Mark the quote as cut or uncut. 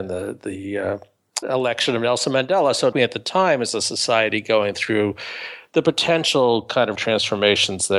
cut